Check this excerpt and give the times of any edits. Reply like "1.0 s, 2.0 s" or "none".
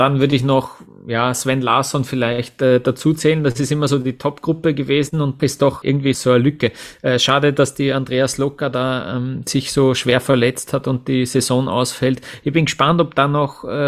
5.4 s, 5.8 s, 6.1 s